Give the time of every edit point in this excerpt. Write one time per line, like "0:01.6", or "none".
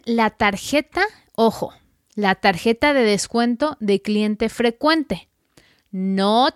none